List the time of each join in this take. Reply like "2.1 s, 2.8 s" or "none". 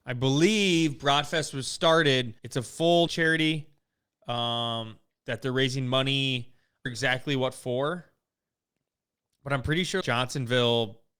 2.4 s, 3.1 s, 5.1 s, 6.9 s, 10.0 s